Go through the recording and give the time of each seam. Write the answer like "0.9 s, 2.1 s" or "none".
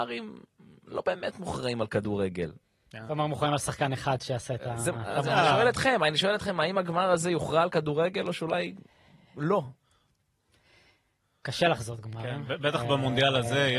none